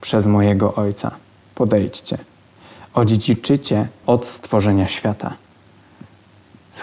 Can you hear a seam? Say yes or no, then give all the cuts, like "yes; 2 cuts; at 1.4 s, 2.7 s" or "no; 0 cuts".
yes; 1 cut; at 4.0 s